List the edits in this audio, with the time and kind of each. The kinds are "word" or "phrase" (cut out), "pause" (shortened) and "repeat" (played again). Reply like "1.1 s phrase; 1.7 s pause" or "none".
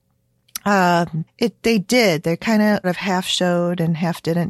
1.3 s word; 1.6 s word; 2.8 s word